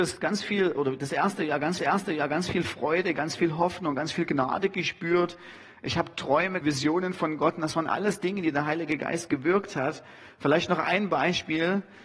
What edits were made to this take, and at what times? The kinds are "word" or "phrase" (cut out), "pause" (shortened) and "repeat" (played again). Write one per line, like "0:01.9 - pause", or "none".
0:01.8 - repeat
0:06.6 - word